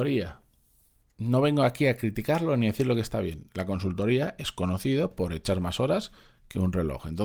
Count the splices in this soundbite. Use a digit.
0